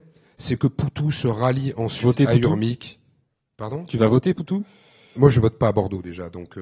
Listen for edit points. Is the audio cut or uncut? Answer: cut